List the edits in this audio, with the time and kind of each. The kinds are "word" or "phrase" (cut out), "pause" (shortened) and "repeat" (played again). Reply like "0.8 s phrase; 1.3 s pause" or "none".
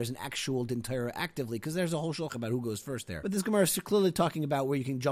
2.3 s word